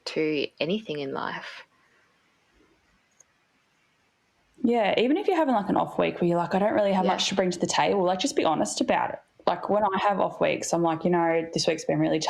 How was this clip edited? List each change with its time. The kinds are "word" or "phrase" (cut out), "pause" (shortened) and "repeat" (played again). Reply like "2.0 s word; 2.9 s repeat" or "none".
none